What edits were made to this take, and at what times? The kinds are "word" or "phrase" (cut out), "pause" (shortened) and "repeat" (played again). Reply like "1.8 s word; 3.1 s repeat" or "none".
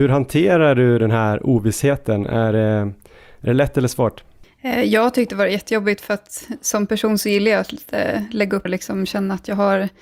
8.7 s word